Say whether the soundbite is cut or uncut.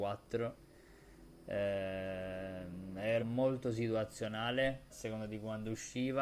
cut